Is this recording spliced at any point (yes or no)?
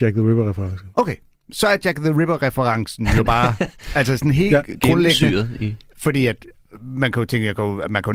no